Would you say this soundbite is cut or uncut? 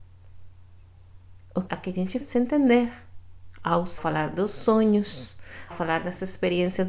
cut